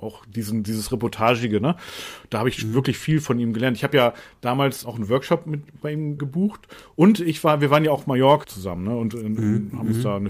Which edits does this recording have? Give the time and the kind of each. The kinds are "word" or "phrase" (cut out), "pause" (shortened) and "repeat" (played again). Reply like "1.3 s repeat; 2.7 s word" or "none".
4.8 s word; 6.2 s word; 8.4 s word